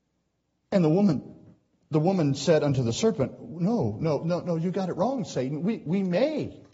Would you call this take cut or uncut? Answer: uncut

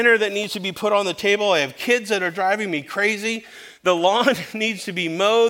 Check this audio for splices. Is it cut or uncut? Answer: uncut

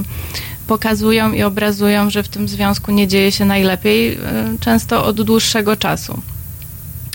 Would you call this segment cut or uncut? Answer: uncut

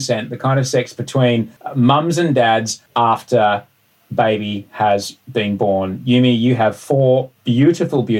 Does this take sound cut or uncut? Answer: cut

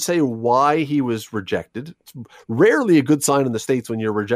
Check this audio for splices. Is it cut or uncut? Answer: uncut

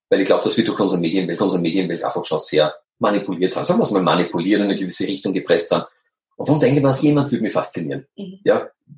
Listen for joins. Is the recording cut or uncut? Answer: cut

